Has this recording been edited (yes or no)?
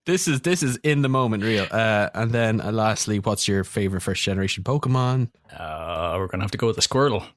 yes